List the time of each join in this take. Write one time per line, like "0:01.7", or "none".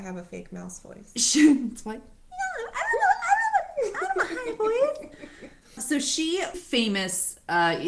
0:05.8
0:06.5